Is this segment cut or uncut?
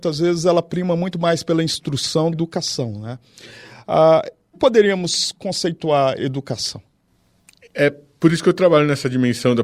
cut